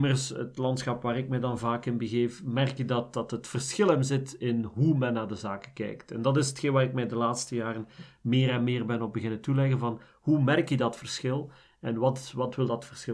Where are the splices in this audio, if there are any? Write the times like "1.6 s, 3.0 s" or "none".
none